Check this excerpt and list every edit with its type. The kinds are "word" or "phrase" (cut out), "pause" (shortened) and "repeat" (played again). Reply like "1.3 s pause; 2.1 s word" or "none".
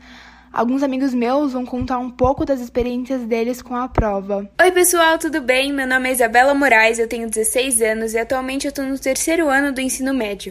4.5 s pause